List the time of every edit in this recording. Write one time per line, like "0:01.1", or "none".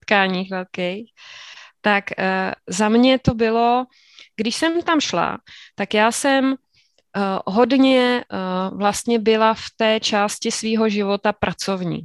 none